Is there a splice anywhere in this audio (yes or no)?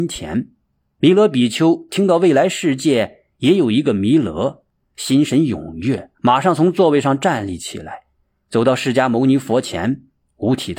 yes